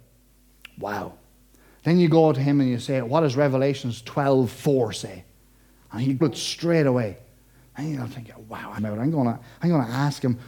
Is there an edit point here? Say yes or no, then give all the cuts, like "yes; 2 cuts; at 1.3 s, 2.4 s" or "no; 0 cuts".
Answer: yes; 2 cuts; at 6.2 s, 8.8 s